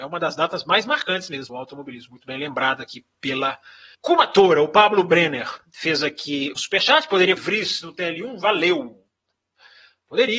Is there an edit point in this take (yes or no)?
yes